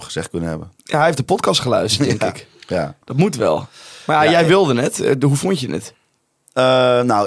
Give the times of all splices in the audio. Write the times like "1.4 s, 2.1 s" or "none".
none

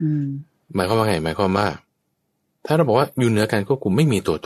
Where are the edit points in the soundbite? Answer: none

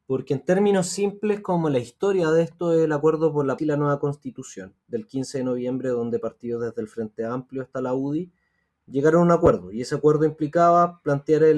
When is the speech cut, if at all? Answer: 3.6 s

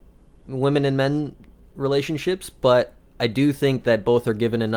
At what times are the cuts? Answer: none

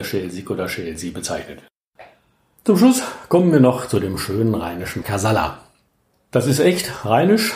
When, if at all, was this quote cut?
5.0 s

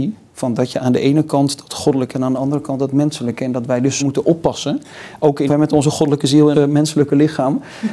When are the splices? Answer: 2.1 s, 4.0 s, 5.5 s, 6.5 s

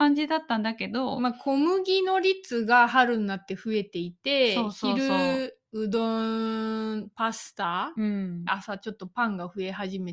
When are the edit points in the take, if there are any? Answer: 8.5 s

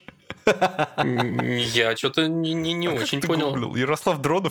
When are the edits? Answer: none

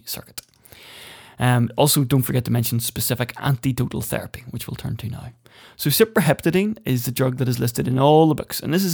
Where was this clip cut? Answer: none

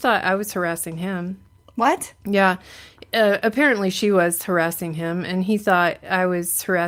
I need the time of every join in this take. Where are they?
none

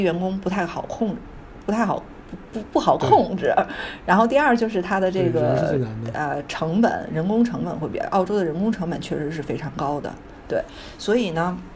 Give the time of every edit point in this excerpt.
none

